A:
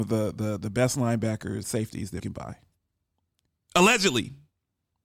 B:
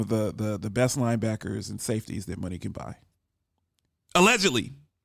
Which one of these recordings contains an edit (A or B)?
A